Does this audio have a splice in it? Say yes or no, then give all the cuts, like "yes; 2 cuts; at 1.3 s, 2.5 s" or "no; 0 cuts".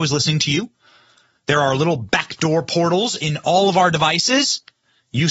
no; 0 cuts